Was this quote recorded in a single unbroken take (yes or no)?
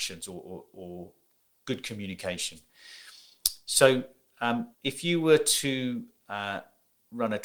no